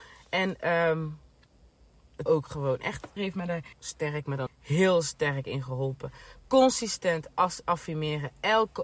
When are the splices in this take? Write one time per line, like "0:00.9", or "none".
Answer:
0:02.3
0:03.2
0:03.7
0:04.5